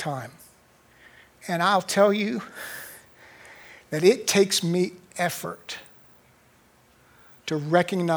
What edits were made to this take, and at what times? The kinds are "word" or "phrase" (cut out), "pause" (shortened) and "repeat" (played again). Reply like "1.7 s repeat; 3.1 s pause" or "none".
none